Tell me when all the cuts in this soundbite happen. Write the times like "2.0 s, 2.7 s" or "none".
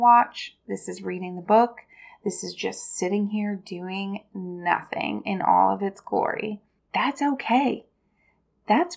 6.8 s